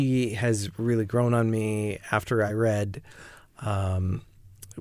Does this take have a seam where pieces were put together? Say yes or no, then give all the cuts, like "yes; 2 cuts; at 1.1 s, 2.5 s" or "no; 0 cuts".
no; 0 cuts